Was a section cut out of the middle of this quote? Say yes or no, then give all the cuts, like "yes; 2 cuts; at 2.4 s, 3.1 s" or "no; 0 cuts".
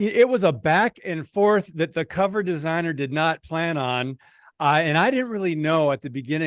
no; 0 cuts